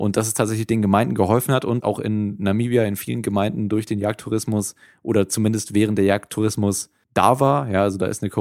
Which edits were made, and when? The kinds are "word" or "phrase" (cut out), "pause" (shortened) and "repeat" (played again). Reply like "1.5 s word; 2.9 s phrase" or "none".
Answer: 1.8 s word; 7.0 s word